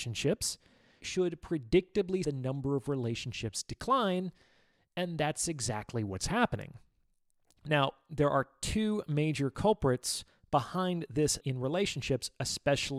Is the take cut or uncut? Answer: cut